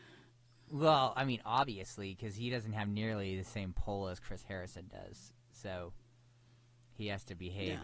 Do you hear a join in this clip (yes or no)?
no